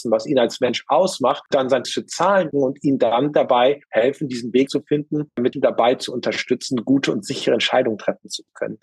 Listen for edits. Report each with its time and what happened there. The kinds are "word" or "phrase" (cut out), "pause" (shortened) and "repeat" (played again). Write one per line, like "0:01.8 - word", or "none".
0:01.5 - word
0:01.8 - word
0:02.5 - phrase
0:03.8 - pause
0:04.7 - phrase
0:05.5 - phrase